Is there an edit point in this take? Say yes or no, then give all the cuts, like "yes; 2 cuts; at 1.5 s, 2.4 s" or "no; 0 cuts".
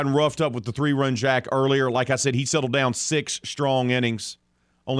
no; 0 cuts